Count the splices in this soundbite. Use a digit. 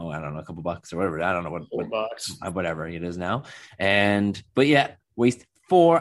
1